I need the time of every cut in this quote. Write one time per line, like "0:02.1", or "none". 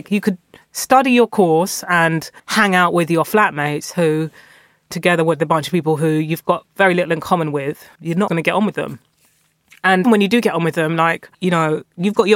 0:02.4
0:04.9
0:08.0
0:08.3
0:10.0
0:11.3

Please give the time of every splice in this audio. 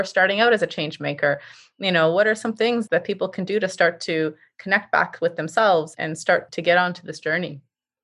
none

